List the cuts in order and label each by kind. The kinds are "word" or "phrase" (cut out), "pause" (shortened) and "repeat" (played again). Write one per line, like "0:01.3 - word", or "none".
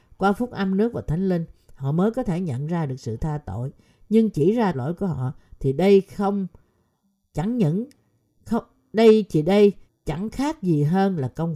0:04.7 - word
0:09.9 - word